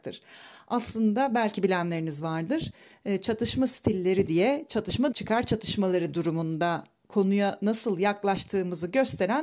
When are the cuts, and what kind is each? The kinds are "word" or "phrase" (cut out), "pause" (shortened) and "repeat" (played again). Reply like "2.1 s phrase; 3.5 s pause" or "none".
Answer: 5.1 s word